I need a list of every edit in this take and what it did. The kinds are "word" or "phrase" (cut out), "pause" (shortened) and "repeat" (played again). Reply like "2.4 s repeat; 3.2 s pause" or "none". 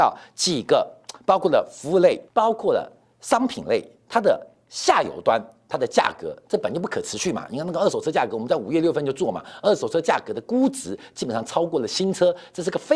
2.3 s pause